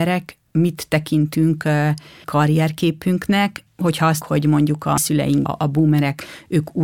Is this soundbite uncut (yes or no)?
no